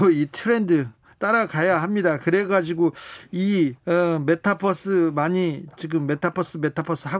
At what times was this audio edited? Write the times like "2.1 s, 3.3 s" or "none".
3.8 s